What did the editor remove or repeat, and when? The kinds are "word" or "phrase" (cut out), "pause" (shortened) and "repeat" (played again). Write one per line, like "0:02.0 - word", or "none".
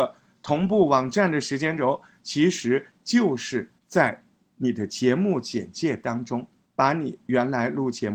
0:03.8 - pause
0:06.7 - pause